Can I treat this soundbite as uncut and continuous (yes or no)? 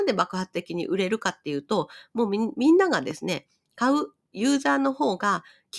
yes